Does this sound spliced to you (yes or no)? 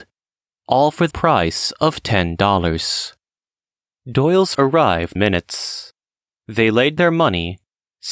yes